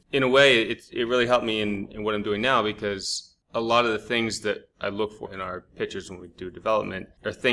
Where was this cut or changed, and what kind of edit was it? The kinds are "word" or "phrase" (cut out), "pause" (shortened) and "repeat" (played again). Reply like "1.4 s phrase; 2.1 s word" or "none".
5.2 s word